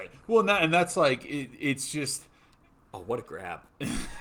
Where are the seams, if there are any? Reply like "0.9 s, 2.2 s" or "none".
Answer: none